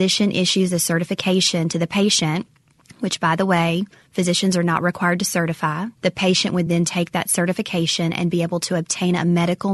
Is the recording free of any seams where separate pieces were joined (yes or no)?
yes